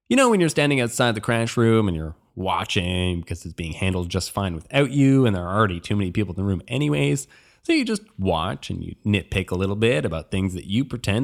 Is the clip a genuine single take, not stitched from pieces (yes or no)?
yes